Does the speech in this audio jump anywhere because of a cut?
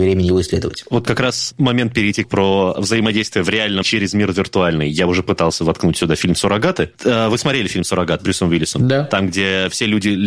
yes; 3 cuts; at 2.2 s, 3.8 s, 8.2 s

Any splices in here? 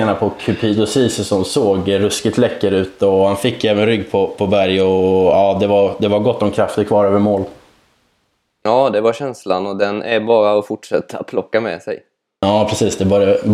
no; 0 cuts

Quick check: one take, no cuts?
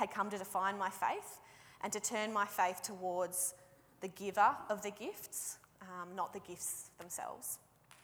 yes; 0 cuts

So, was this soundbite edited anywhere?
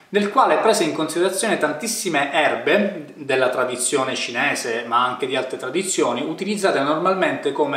no; 0 cuts

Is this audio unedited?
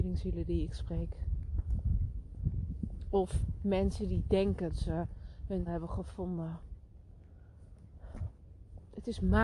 no; 2 cuts; at 4.7 s, 5.7 s

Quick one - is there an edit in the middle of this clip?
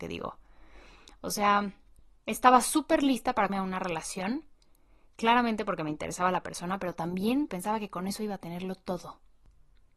yes; 2 cuts; at 3.5 s, 7.5 s

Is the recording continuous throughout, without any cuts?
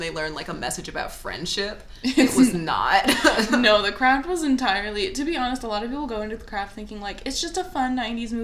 yes; 0 cuts

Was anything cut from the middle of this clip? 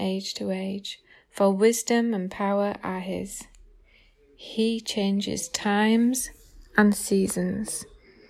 no; 0 cuts

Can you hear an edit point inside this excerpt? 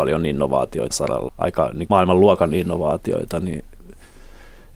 yes; 3 cuts; at 0.9 s, 1.3 s, 1.9 s

